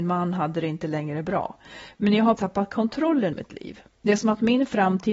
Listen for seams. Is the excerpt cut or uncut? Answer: cut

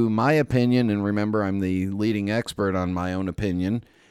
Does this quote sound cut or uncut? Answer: uncut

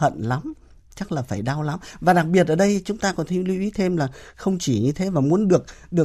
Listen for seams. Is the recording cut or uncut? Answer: uncut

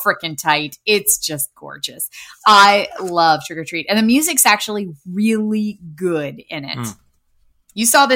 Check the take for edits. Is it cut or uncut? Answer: uncut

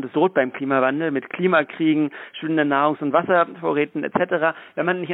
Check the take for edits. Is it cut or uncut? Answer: uncut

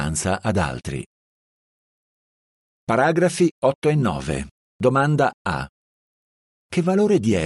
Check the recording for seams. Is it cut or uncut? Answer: uncut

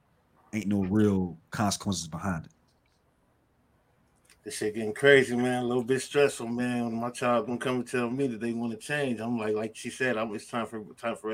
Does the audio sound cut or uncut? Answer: uncut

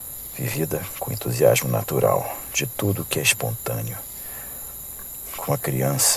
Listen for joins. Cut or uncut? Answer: uncut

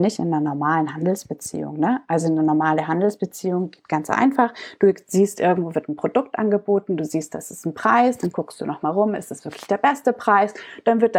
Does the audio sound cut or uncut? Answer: uncut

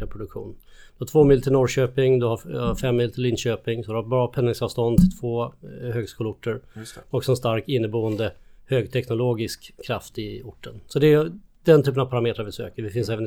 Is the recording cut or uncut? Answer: uncut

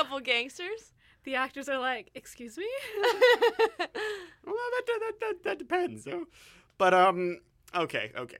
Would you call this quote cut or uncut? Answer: uncut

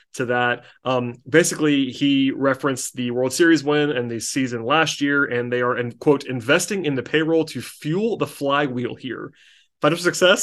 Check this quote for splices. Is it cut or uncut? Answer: uncut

